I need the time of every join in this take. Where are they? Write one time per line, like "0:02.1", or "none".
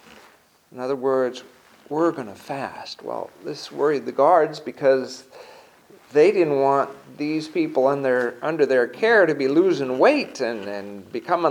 none